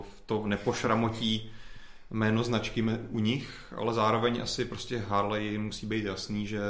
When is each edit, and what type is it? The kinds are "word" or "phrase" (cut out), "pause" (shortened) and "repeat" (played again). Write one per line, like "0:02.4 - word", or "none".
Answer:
none